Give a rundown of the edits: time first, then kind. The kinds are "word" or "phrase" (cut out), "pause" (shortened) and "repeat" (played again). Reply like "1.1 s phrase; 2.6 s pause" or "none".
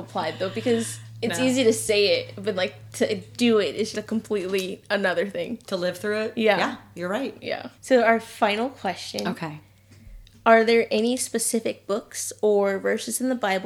2.6 s word; 3.9 s word; 7.8 s pause

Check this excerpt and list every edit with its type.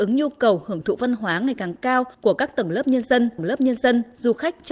2.1 s pause; 3.4 s repeat

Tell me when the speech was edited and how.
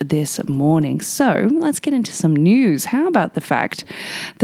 none

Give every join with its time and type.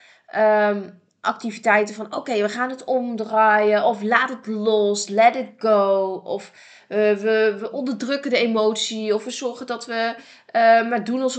none

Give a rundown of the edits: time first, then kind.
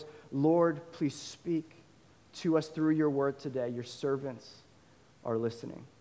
none

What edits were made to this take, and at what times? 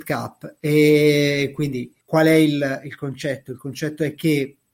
2.0 s pause

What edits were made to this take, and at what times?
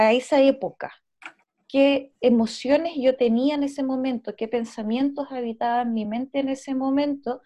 none

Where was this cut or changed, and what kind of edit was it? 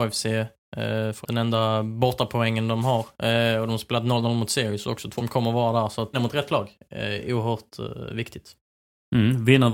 1.2 s word; 5.2 s word; 6.1 s phrase

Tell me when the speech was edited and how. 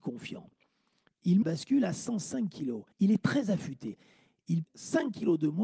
1.4 s phrase; 2.9 s pause; 4.6 s word

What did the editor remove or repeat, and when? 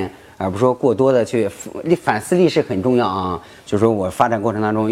none

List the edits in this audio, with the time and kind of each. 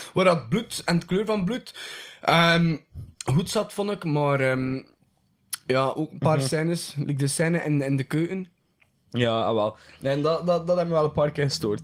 3.1 s pause

